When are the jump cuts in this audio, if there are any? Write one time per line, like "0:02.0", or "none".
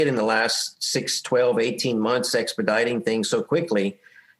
none